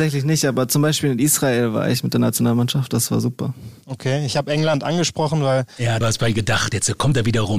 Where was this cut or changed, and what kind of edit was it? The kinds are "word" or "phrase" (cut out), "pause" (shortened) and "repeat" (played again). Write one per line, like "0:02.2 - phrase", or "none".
0:06.0 - phrase